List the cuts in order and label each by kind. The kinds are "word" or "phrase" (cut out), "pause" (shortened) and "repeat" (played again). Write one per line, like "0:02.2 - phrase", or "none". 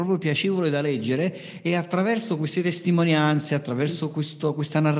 none